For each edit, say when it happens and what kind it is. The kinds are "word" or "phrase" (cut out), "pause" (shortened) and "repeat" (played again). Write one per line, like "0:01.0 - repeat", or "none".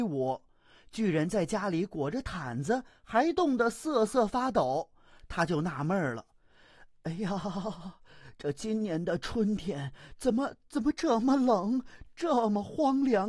none